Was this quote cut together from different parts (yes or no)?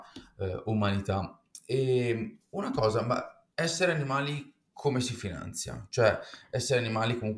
yes